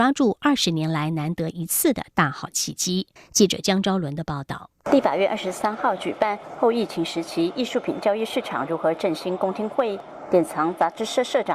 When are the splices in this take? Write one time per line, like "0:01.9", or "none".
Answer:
0:03.2

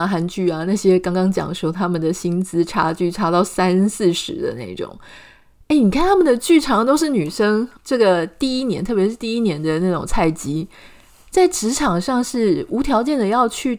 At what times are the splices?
0:07.8

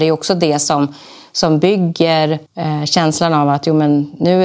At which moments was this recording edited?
0:02.5

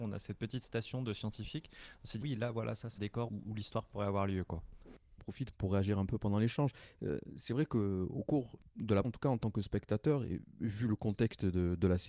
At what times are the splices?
0:02.2
0:03.0
0:03.3
0:05.2
0:05.5
0:09.0

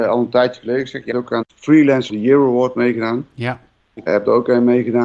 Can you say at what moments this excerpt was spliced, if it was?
0:01.1
0:01.4
0:02.1
0:04.1

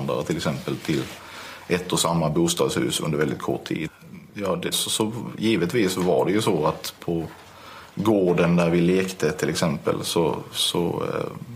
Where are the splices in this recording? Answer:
0:04.3
0:04.7
0:07.0

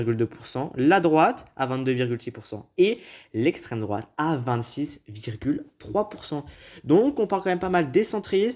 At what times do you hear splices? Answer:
none

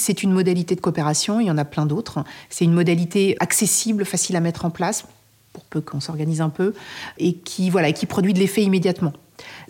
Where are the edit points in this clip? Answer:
0:03.4
0:07.2

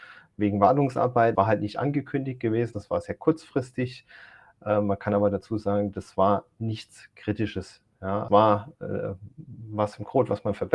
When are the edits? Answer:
0:01.3
0:02.7
0:08.3

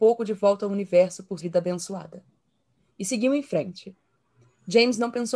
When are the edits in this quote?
0:01.4

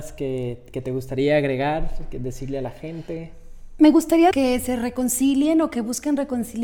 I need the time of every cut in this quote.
0:04.3

